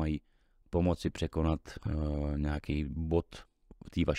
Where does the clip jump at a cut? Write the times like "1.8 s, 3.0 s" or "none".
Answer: none